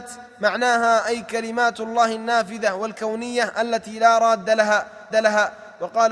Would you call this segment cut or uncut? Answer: cut